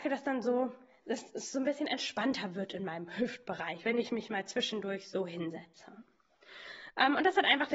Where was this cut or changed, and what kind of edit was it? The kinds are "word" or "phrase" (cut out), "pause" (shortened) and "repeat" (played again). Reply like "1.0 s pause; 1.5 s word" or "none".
none